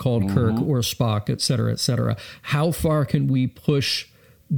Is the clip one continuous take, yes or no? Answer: yes